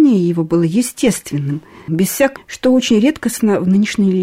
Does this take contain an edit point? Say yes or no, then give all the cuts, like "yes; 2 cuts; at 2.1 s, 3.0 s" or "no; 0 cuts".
yes; 2 cuts; at 1.9 s, 2.4 s